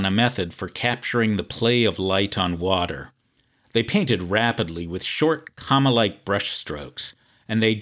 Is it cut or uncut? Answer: uncut